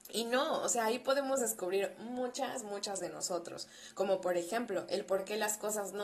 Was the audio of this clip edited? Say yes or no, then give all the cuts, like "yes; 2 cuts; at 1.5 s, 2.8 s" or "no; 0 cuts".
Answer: yes; 1 cut; at 3.0 s